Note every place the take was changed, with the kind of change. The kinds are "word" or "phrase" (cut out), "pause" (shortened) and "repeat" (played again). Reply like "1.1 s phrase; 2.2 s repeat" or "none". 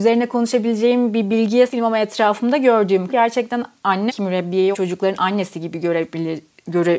1.7 s word; 3.1 s word; 4.1 s word; 4.7 s word